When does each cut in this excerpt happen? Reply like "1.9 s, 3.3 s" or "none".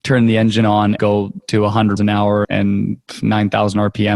1.0 s, 1.4 s, 2.0 s, 2.4 s